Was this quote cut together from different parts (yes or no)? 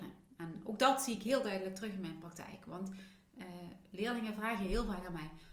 no